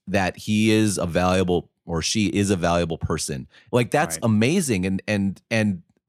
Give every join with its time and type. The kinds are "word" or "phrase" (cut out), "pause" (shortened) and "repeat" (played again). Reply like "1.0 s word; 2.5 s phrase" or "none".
none